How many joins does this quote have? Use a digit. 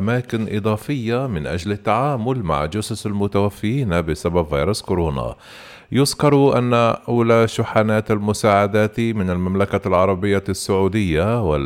0